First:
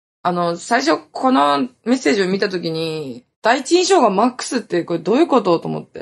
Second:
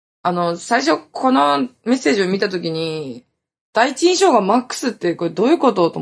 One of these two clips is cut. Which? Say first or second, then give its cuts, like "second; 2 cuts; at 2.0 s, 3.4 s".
first; 1 cut; at 3.3 s